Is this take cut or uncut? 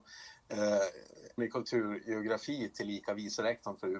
cut